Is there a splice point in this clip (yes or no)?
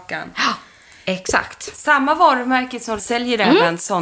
yes